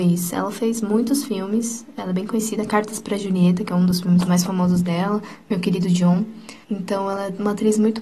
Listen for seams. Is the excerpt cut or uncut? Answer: cut